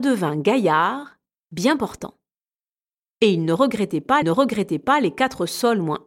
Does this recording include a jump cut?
yes; 1 cut; at 4.2 s

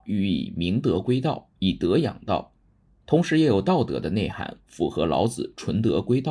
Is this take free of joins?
yes; 0 cuts

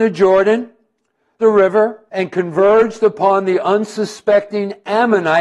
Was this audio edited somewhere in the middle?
yes; 2 cuts; at 1.4 s, 2.1 s

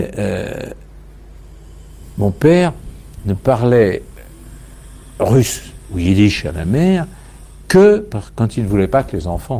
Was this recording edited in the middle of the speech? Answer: no; 0 cuts

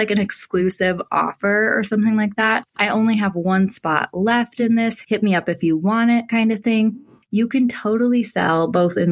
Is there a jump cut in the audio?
no; 0 cuts

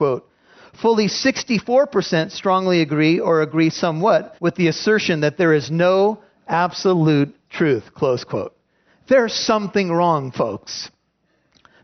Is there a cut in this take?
yes; 1 cut; at 4.4 s

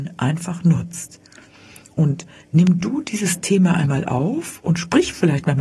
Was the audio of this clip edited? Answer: no; 0 cuts

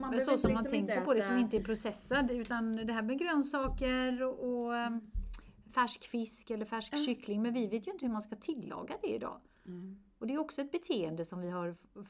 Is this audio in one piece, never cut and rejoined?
yes; 0 cuts

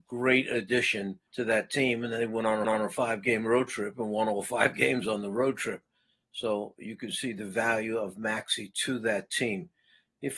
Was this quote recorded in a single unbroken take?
no; 2 cuts; at 1.3 s, 2.6 s

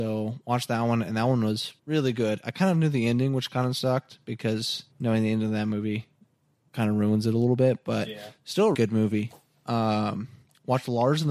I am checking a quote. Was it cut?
yes; 3 cuts; at 1.8 s, 4.9 s, 8.7 s

